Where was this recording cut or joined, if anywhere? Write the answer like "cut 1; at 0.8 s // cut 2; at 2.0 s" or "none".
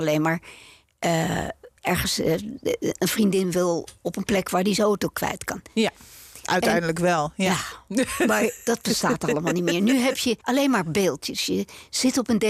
cut 1; at 10.4 s